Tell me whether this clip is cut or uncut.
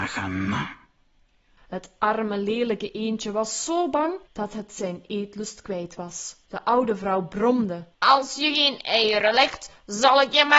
cut